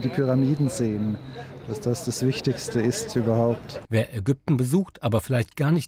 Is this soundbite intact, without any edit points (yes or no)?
yes